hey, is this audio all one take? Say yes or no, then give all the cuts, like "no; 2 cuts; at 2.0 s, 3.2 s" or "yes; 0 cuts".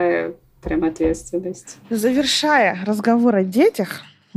yes; 0 cuts